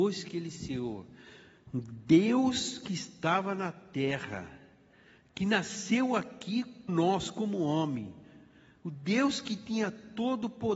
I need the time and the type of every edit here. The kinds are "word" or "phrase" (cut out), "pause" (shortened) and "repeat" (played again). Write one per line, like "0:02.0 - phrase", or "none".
0:06.9 - word